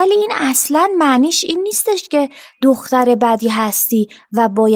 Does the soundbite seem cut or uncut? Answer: uncut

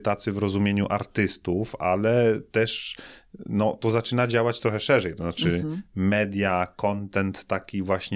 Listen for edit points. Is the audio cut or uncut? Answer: uncut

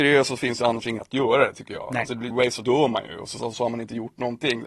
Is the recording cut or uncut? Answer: cut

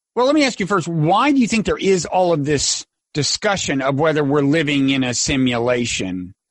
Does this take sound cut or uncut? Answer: uncut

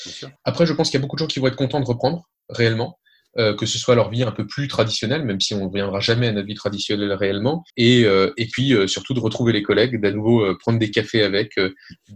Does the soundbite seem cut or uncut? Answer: cut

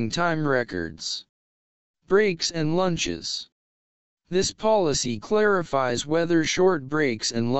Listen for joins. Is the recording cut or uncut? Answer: uncut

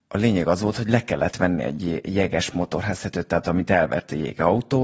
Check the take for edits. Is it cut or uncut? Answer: uncut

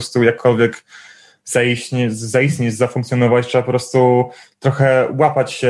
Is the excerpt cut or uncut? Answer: uncut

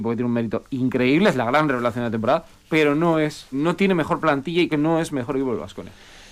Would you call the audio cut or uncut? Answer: cut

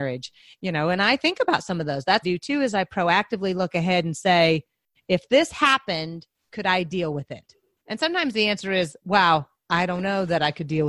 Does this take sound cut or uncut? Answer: cut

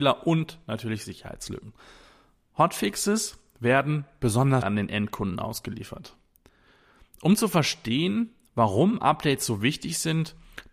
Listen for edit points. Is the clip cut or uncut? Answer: cut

